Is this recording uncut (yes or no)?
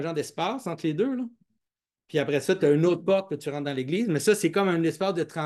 yes